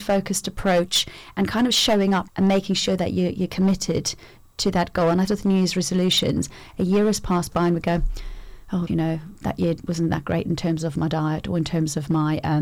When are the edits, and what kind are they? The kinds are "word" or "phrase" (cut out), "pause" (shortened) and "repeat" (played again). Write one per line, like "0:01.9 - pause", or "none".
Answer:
0:02.3 - word
0:05.3 - phrase
0:08.9 - word